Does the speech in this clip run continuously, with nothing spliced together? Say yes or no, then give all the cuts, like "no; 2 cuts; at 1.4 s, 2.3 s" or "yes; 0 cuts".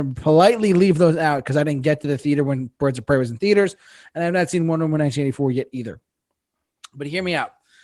yes; 0 cuts